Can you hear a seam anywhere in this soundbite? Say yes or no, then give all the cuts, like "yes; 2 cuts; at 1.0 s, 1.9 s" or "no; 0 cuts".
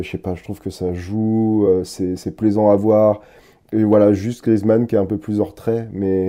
no; 0 cuts